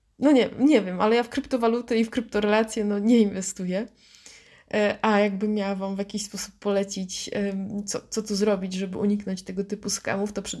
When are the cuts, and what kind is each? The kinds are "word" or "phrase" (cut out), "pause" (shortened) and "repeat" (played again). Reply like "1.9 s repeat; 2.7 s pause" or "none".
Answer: none

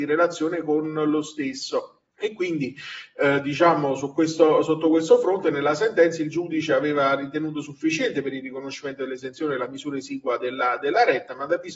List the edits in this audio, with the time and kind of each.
2.1 s pause

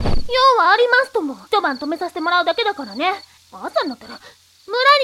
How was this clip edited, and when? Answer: 1.5 s pause; 3.4 s pause

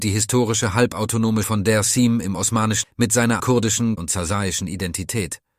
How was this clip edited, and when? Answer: 1.4 s word; 2.8 s word; 3.4 s word; 4.0 s word

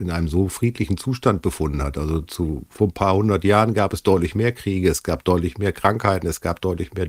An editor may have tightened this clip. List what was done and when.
2.2 s word

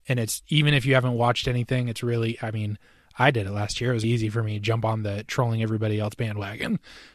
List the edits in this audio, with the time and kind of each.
4.0 s word

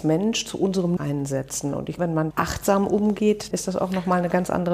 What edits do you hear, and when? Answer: 1.0 s word; 2.0 s word; 2.3 s word; 3.5 s word

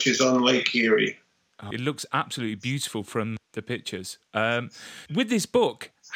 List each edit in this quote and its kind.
1.7 s word; 5.1 s word

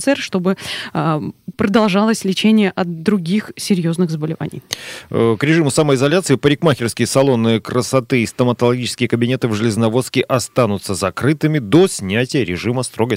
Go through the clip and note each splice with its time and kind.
1.5 s word

